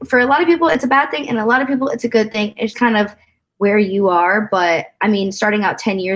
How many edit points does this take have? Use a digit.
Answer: 1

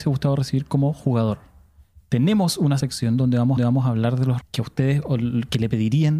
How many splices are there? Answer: 3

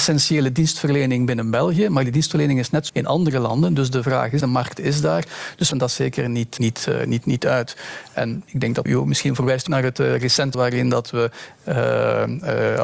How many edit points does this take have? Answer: 7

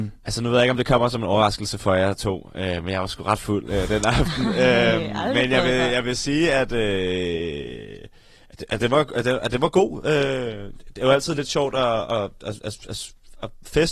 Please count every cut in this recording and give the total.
0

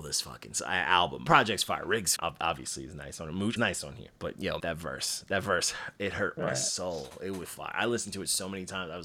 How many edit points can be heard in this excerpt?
6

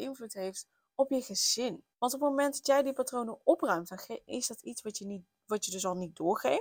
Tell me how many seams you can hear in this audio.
1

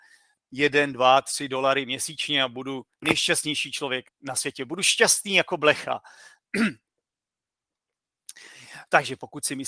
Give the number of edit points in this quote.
1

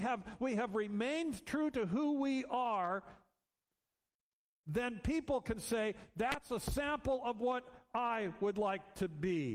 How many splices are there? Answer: 0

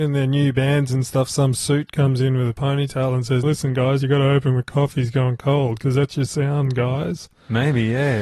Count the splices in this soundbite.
1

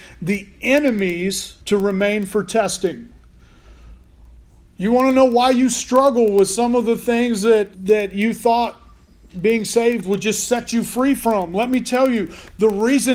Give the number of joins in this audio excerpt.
2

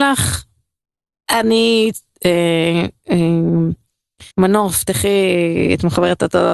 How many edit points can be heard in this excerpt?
1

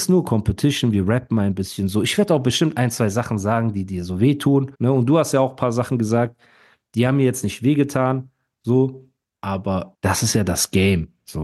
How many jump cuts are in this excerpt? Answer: 2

